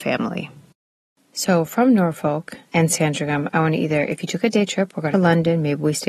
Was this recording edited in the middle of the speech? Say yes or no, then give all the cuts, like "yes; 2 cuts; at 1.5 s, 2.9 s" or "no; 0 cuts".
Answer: yes; 2 cuts; at 2.6 s, 5.1 s